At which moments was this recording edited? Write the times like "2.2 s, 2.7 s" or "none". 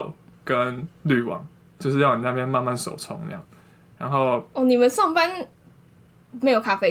none